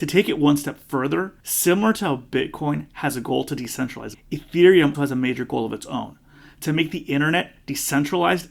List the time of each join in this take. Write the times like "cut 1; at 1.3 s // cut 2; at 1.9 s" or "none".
cut 1; at 1.4 s // cut 2; at 4.1 s // cut 3; at 4.9 s